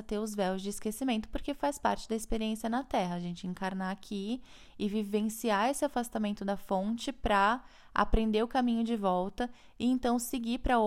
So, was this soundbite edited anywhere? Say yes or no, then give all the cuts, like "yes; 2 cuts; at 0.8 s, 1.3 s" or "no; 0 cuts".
no; 0 cuts